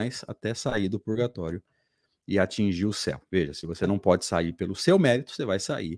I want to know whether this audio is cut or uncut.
uncut